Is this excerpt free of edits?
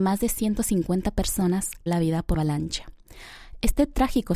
no; 2 cuts; at 1.9 s, 2.3 s

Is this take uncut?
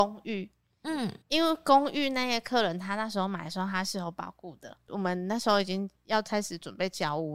no; 1 cut; at 1.2 s

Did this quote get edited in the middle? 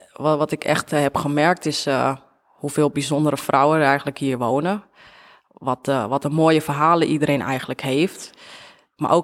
no; 0 cuts

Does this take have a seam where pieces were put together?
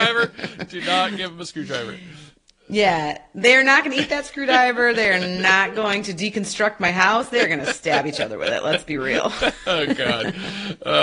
no; 0 cuts

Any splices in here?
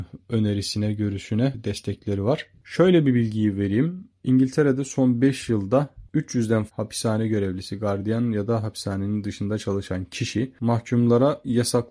yes; 1 cut; at 6.7 s

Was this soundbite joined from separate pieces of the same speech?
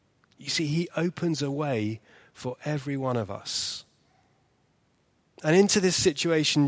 no; 0 cuts

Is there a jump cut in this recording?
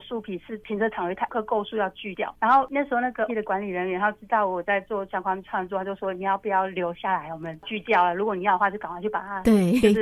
yes; 1 cut; at 3.3 s

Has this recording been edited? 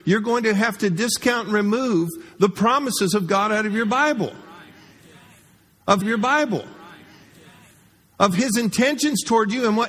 yes; 1 cut; at 6.0 s

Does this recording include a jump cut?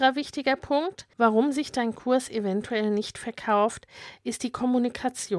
yes; 1 cut; at 1.1 s

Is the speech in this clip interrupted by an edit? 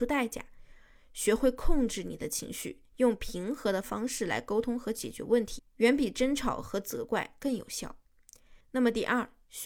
yes; 1 cut; at 8.6 s

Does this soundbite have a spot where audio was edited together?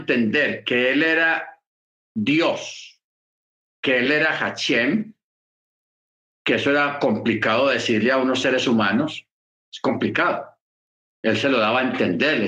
no; 0 cuts

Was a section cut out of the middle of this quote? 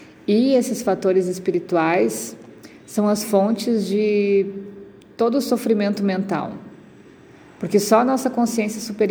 no; 0 cuts

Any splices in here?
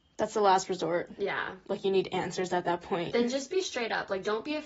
no; 0 cuts

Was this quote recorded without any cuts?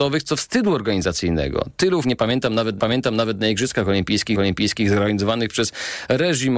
no; 3 cuts; at 2.0 s, 2.8 s, 4.3 s

